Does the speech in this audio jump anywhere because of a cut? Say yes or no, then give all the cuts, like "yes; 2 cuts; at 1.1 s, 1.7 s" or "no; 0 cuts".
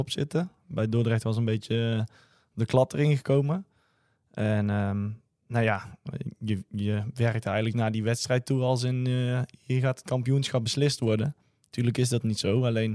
no; 0 cuts